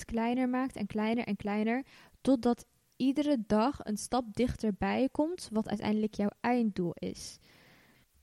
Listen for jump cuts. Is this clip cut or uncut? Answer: uncut